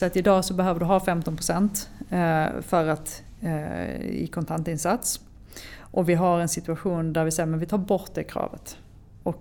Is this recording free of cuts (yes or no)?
yes